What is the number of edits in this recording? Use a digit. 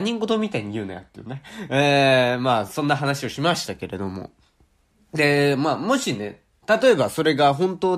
0